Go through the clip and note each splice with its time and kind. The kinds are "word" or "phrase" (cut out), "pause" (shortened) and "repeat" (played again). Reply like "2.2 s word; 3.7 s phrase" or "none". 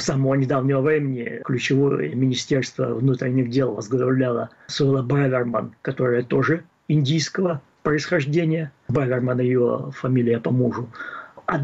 none